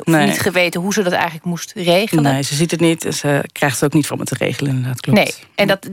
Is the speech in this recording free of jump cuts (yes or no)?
no